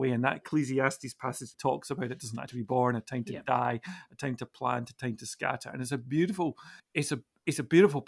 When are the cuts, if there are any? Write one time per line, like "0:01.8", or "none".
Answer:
0:01.5
0:02.5
0:06.8